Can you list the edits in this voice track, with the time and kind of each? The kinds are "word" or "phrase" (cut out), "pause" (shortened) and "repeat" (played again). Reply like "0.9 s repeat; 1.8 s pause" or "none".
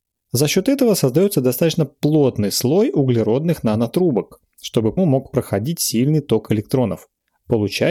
5.0 s word